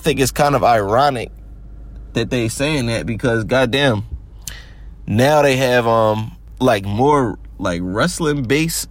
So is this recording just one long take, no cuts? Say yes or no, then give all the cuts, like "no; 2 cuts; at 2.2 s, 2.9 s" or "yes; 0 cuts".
yes; 0 cuts